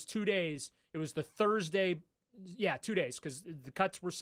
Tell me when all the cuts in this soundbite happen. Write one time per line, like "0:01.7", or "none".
none